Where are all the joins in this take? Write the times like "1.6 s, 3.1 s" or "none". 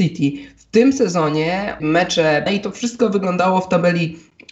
1.8 s, 2.5 s